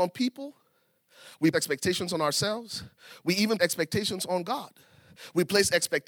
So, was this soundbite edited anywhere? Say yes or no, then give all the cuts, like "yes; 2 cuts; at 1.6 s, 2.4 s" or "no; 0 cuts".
yes; 2 cuts; at 1.5 s, 3.6 s